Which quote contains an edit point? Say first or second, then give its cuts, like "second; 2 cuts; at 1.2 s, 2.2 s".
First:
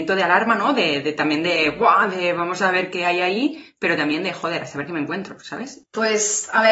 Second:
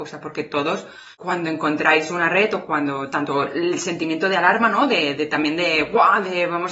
second; 1 cut; at 1.1 s